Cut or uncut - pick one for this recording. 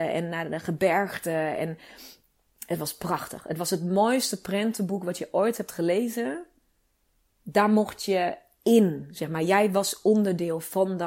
uncut